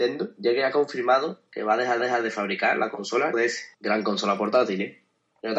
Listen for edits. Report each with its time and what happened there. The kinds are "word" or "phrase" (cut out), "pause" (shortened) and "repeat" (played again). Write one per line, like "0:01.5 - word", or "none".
0:02.0 - repeat
0:03.3 - word
0:03.7 - pause